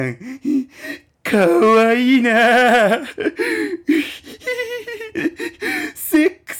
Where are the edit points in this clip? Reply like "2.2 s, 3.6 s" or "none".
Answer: none